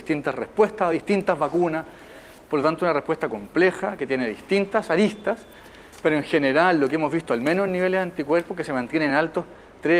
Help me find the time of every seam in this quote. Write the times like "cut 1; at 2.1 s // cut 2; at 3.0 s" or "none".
none